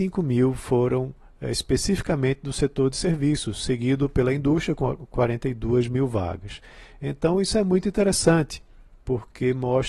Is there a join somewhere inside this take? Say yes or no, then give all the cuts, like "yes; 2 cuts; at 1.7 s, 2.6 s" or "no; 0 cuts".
no; 0 cuts